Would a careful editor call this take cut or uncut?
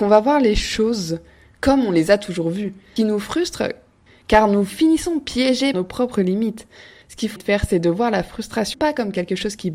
cut